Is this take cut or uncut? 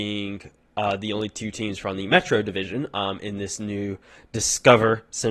uncut